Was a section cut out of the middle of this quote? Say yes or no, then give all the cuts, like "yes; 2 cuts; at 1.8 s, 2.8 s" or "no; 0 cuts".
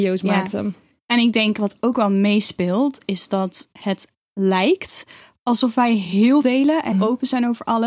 yes; 2 cuts; at 6.4 s, 6.9 s